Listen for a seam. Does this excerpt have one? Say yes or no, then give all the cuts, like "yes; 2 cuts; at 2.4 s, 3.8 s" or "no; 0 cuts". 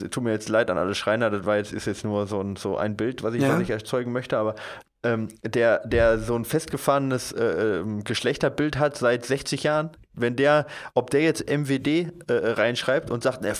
no; 0 cuts